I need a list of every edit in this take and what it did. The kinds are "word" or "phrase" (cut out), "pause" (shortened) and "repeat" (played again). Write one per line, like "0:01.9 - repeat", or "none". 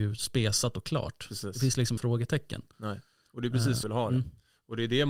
0:02.0 - word
0:03.8 - word